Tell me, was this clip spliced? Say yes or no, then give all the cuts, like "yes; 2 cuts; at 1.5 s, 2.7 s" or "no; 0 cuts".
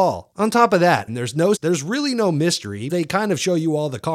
yes; 3 cuts; at 1.1 s, 1.6 s, 2.9 s